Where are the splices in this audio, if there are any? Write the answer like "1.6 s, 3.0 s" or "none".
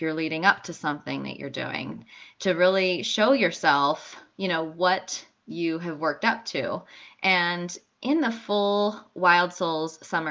none